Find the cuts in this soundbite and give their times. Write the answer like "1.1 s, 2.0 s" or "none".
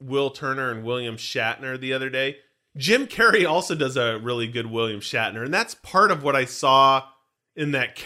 none